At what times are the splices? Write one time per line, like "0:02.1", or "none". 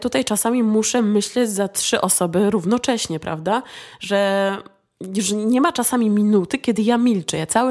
none